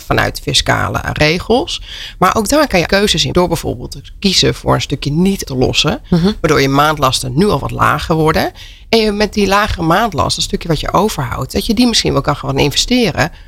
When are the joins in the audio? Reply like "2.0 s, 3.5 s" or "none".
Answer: 2.9 s, 3.3 s, 5.4 s